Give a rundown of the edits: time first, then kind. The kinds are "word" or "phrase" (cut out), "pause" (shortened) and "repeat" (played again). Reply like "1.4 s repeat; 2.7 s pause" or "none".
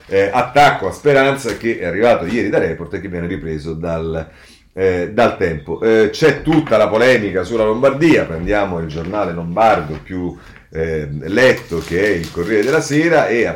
none